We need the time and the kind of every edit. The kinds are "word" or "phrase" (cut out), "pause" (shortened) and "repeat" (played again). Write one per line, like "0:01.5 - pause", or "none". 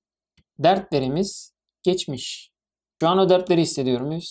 0:03.0 - word